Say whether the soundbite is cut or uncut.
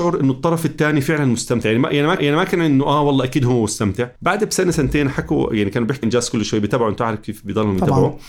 cut